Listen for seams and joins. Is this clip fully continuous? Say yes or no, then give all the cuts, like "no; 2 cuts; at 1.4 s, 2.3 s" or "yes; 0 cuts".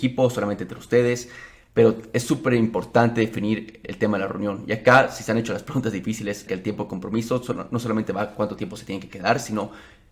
no; 2 cuts; at 3.8 s, 6.5 s